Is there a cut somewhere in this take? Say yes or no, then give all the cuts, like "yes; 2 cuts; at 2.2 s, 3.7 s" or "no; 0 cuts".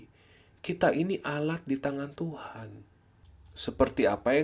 no; 0 cuts